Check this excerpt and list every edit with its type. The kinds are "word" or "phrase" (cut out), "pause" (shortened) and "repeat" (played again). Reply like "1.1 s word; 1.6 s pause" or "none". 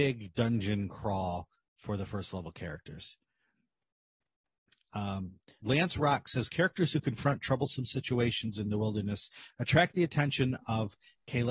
5.6 s word